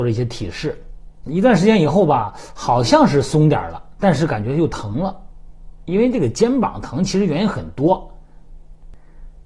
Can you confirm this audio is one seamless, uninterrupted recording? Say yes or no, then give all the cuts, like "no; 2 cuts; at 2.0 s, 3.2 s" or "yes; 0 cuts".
no; 1 cut; at 1.3 s